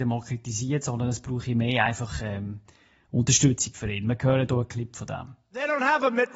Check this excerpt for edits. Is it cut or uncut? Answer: uncut